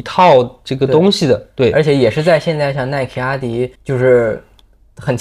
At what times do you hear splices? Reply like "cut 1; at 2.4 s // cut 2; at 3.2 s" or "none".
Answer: cut 1; at 3.7 s